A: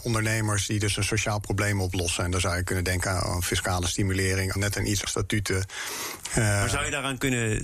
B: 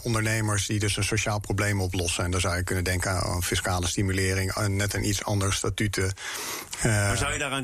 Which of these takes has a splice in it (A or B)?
A